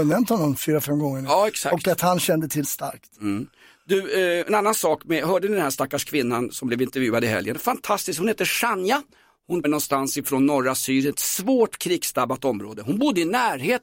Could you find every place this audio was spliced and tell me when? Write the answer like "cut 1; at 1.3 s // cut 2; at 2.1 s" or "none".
cut 1; at 2.6 s // cut 2; at 4.4 s // cut 3; at 9.6 s